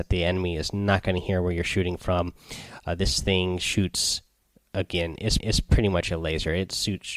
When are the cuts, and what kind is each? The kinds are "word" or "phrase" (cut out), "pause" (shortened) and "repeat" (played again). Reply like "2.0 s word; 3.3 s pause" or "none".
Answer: 5.4 s repeat